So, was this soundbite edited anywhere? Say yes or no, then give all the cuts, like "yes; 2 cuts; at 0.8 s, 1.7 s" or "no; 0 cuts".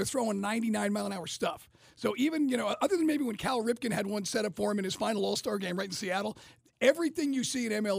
no; 0 cuts